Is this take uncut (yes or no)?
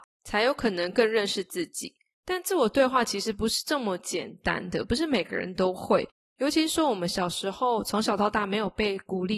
yes